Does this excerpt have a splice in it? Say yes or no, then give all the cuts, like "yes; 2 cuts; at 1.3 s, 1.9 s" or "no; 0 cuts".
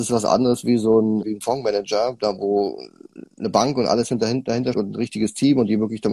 yes; 2 cuts; at 1.2 s, 4.7 s